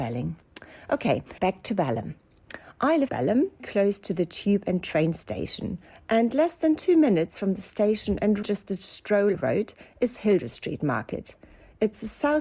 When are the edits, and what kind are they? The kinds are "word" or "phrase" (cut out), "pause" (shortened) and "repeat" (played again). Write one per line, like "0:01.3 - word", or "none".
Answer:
0:01.4 - word
0:03.1 - phrase
0:03.6 - word
0:05.9 - pause
0:08.4 - word
0:09.3 - phrase